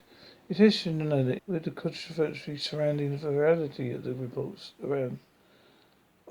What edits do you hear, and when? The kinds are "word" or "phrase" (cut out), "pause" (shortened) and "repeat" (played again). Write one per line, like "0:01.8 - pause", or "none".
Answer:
0:01.4 - word